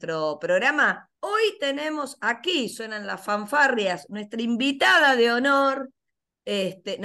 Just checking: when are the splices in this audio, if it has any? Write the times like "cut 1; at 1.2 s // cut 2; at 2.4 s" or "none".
cut 1; at 1.2 s